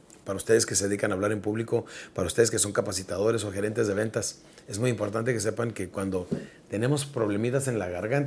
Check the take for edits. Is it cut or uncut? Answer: uncut